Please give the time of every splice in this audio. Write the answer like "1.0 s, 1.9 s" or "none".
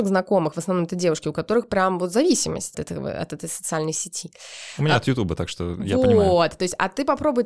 2.7 s